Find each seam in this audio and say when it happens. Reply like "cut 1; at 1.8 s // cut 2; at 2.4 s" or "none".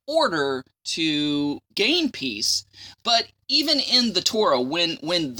cut 1; at 1.7 s // cut 2; at 3.4 s